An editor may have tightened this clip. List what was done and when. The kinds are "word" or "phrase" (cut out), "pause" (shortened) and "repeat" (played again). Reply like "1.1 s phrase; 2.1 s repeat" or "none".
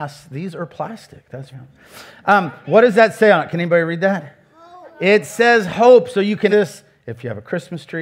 1.5 s word; 2.6 s word; 4.9 s word; 6.5 s word